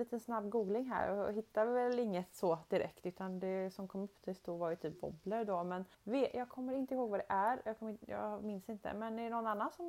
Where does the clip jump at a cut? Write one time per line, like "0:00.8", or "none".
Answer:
0:05.9